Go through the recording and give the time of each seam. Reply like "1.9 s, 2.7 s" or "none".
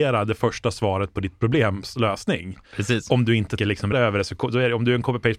3.6 s, 3.9 s